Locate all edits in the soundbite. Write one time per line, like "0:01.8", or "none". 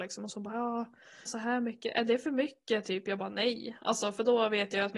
0:01.3